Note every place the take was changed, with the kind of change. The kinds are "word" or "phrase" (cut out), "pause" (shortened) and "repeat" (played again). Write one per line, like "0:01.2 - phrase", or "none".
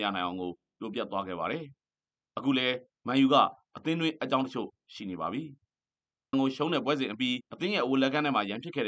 0:01.8 - pause
0:06.3 - word
0:07.5 - pause